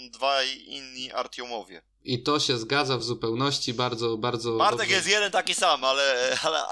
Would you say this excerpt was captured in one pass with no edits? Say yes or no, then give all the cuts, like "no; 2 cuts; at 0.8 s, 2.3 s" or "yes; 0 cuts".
yes; 0 cuts